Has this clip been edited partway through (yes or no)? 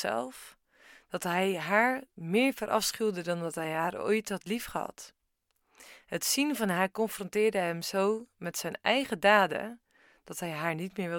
no